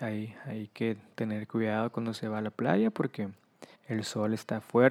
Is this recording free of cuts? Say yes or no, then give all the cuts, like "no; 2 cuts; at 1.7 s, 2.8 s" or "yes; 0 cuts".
no; 1 cut; at 3.7 s